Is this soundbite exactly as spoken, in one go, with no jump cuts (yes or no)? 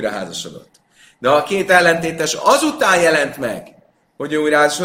yes